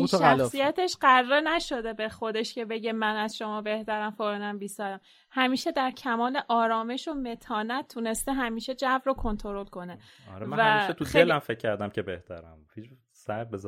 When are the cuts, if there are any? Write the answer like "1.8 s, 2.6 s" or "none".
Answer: none

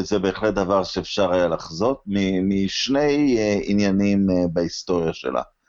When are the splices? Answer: none

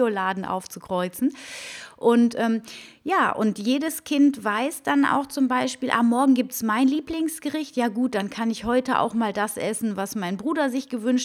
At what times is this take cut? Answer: none

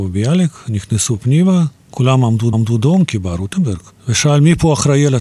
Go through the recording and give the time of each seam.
1.8 s, 2.5 s, 3.9 s

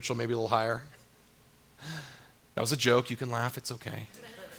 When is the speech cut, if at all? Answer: none

